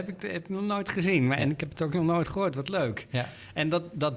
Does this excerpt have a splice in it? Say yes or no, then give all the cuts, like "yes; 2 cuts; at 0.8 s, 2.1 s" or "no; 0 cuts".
no; 0 cuts